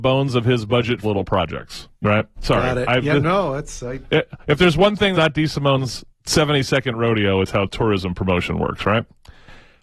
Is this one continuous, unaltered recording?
no; 4 cuts; at 1.0 s, 1.9 s, 5.1 s, 6.1 s

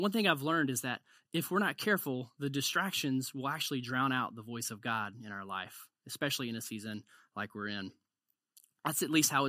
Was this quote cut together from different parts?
no; 0 cuts

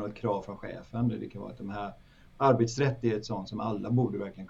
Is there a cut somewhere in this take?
no; 0 cuts

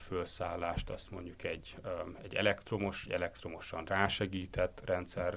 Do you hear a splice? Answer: yes; 1 cut; at 3.0 s

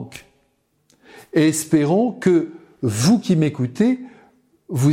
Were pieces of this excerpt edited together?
no; 0 cuts

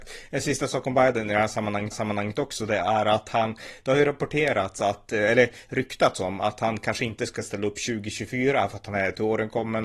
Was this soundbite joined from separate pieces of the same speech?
yes; 1 cut; at 1.9 s

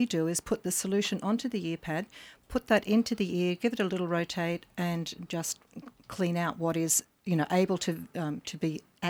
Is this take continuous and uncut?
yes; 0 cuts

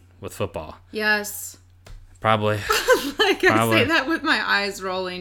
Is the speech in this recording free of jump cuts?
yes; 0 cuts

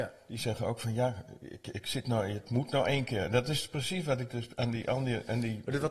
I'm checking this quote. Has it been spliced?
no; 0 cuts

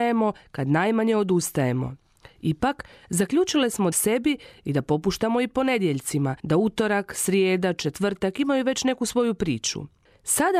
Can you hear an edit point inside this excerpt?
yes; 2 cuts; at 3.9 s, 6.4 s

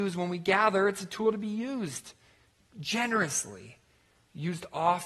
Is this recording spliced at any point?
no; 0 cuts

